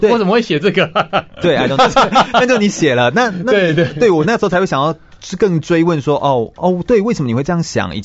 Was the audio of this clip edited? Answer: yes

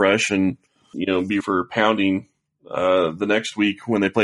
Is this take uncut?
no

